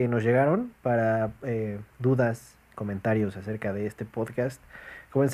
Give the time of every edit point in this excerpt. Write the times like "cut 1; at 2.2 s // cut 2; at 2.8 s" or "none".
cut 1; at 1.9 s